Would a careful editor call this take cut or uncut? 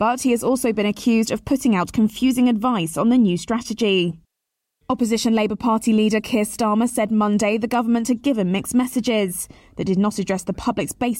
uncut